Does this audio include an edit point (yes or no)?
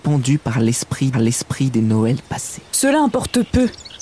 yes